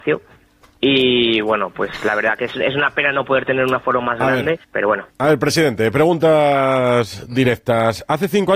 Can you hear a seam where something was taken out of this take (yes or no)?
yes